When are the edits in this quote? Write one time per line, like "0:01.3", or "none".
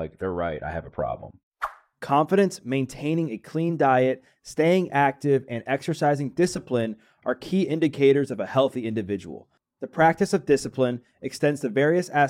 none